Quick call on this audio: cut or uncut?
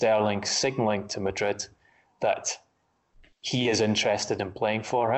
uncut